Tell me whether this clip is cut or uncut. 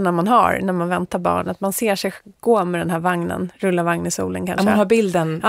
uncut